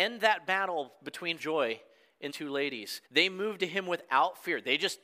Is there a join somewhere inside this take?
yes; 3 cuts; at 1.4 s, 2.3 s, 3.0 s

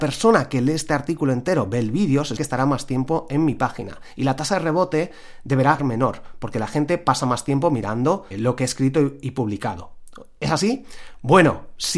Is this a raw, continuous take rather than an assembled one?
no; 3 cuts; at 2.4 s, 5.8 s, 8.3 s

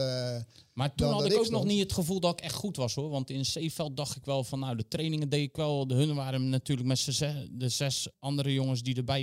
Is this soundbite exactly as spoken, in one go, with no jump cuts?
no; 1 cut; at 8.1 s

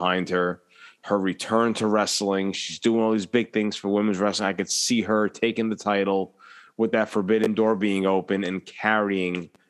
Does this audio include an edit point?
no; 0 cuts

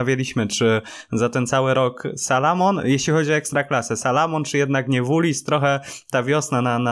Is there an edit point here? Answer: no; 0 cuts

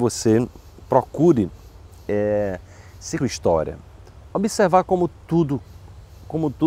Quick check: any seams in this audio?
yes; 1 cut; at 3.2 s

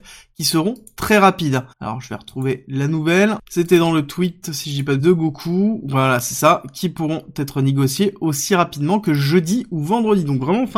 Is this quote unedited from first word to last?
no; 2 cuts; at 1.7 s, 5.0 s

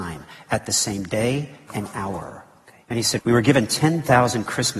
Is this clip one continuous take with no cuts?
no; 3 cuts; at 1.7 s, 2.8 s, 3.2 s

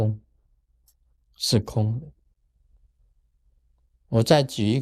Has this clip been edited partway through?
no; 0 cuts

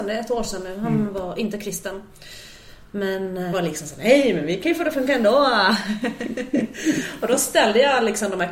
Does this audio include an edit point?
yes; 1 cut; at 3.5 s

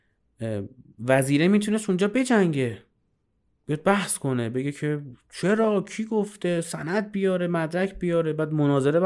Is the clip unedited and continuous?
yes; 0 cuts

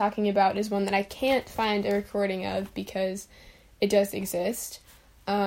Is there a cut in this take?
no; 0 cuts

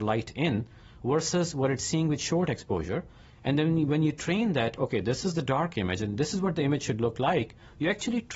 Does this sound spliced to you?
no; 0 cuts

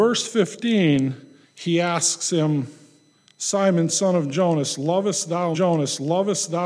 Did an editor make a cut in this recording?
yes; 3 cuts; at 1.4 s, 3.1 s, 5.5 s

